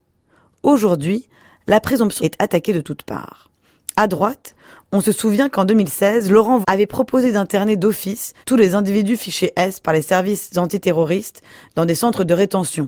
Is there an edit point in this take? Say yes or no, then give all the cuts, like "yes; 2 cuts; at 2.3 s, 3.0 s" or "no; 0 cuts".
yes; 3 cuts; at 2.2 s, 6.6 s, 8.4 s